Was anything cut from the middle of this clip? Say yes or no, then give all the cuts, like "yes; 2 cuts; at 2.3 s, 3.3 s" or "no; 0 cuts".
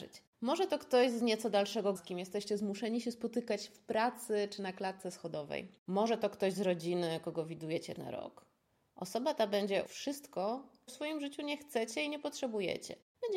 yes; 4 cuts; at 2.0 s, 8.0 s, 9.9 s, 10.9 s